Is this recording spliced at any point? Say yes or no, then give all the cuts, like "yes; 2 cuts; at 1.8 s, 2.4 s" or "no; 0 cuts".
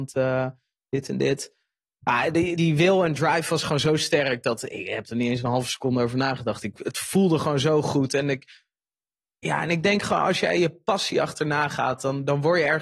yes; 1 cut; at 2.6 s